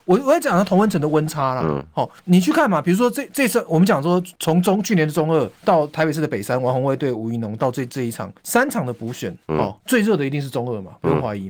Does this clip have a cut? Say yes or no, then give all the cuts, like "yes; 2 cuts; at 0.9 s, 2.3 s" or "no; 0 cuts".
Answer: yes; 6 cuts; at 2.2 s, 4.4 s, 5.5 s, 8.4 s, 9.4 s, 9.8 s